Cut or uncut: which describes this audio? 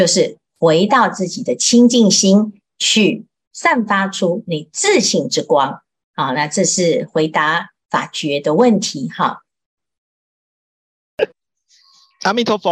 uncut